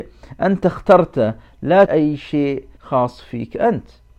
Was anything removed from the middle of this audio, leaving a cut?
yes; 2 cuts; at 1.9 s, 2.8 s

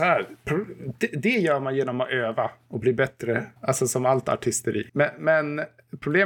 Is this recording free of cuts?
no; 2 cuts; at 3.6 s, 4.9 s

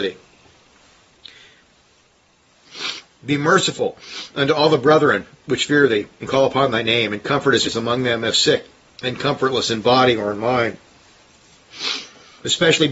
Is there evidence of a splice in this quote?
yes; 2 cuts; at 7.7 s, 8.3 s

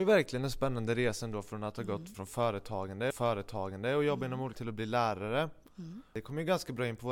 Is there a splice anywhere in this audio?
yes; 3 cuts; at 2.1 s, 3.1 s, 4.6 s

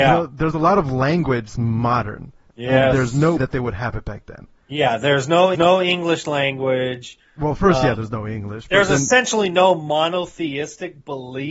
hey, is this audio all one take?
no; 4 cuts; at 1.5 s, 2.5 s, 3.4 s, 5.5 s

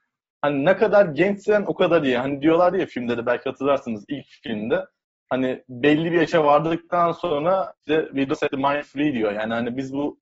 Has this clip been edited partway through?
no; 0 cuts

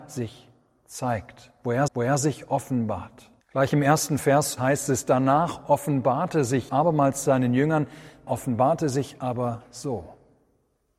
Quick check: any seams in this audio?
yes; 5 cuts; at 1.9 s, 3.4 s, 4.6 s, 6.7 s, 8.3 s

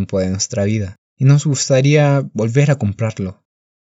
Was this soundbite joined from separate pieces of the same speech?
yes; 1 cut; at 1.0 s

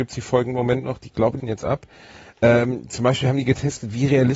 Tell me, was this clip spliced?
yes; 1 cut; at 1.4 s

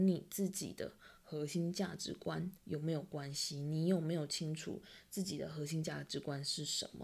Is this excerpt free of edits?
no; 1 cut; at 2.6 s

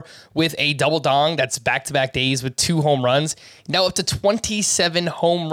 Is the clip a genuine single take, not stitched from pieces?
yes; 0 cuts

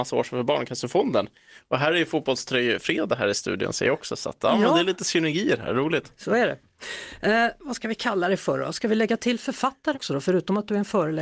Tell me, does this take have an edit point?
yes; 1 cut; at 9.9 s

